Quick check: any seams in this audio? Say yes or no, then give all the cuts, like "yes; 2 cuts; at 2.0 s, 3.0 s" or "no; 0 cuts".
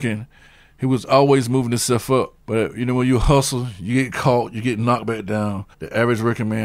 yes; 2 cuts; at 2.4 s, 5.7 s